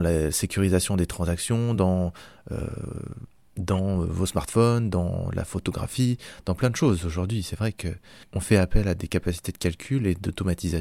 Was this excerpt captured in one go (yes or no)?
yes